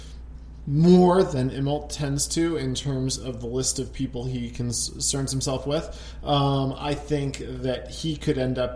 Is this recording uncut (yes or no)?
yes